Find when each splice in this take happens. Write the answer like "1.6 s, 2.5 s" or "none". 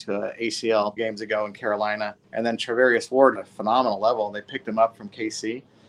1.0 s, 2.2 s, 3.4 s